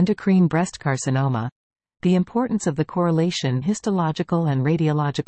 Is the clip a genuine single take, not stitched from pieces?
no; 1 cut; at 3.6 s

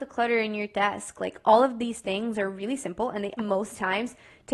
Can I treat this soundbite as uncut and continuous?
no; 1 cut; at 3.4 s

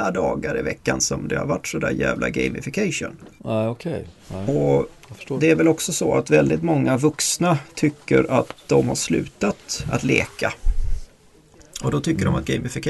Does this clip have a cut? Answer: yes; 1 cut; at 3.4 s

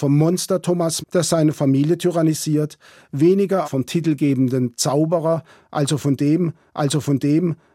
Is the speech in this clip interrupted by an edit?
yes; 3 cuts; at 1.0 s, 3.6 s, 6.7 s

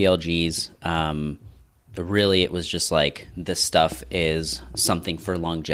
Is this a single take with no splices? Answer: yes; 0 cuts

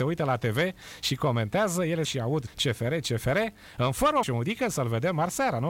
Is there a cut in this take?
yes; 3 cuts; at 2.0 s, 2.5 s, 4.2 s

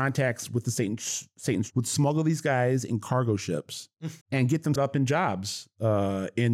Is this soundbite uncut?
no; 3 cuts; at 1.7 s, 4.2 s, 4.8 s

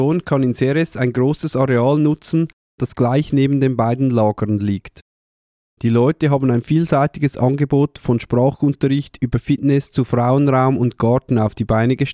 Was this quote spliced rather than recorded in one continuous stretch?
no; 0 cuts

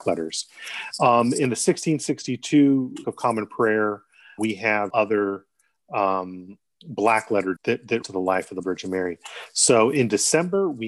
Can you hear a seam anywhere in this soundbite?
yes; 6 cuts; at 3.0 s, 4.4 s, 4.9 s, 7.6 s, 8.0 s, 8.6 s

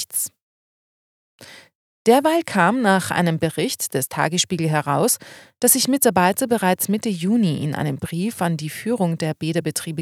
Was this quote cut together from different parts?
no; 0 cuts

